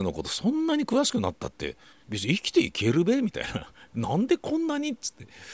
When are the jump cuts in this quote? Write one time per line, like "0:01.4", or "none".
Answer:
0:01.9